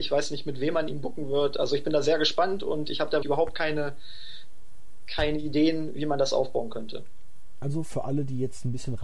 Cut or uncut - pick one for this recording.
cut